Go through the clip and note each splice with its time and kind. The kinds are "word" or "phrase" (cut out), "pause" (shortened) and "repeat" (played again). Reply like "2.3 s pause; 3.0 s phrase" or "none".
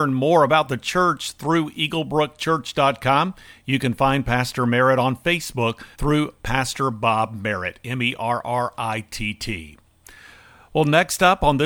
5.9 s pause

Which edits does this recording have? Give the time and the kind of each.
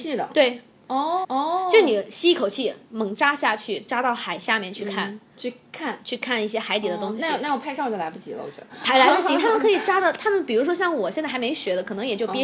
1.2 s repeat; 5.3 s pause

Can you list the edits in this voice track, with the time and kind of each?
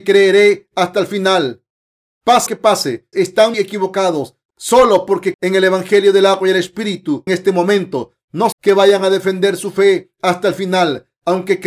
2.5 s word; 3.1 s word; 3.5 s word; 5.3 s word; 7.3 s word; 8.5 s word

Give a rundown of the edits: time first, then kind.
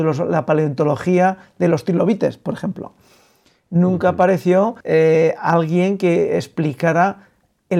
4.8 s pause

